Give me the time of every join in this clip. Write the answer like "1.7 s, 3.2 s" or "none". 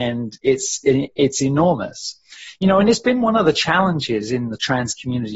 none